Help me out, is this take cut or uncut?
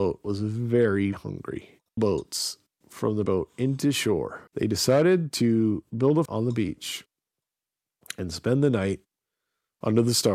cut